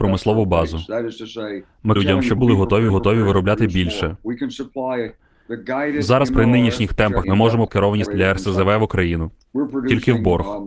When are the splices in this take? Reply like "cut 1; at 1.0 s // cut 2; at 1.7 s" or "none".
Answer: cut 1; at 2.0 s // cut 2; at 2.4 s // cut 3; at 2.9 s // cut 4; at 7.2 s // cut 5; at 7.7 s // cut 6; at 8.1 s